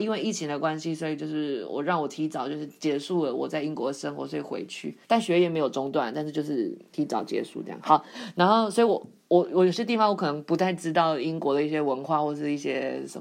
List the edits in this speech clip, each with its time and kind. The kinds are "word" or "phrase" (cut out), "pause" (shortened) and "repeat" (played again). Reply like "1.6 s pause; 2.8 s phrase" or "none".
5.0 s pause